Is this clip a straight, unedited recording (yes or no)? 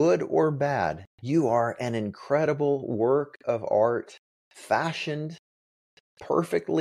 no